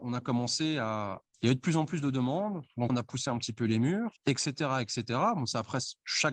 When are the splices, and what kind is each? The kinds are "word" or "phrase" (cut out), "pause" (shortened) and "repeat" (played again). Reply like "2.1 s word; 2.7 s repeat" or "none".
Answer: 1.2 s phrase; 2.9 s word; 4.2 s pause